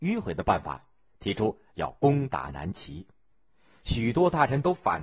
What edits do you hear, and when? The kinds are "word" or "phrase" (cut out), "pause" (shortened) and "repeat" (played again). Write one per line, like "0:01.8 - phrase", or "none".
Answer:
0:03.3 - pause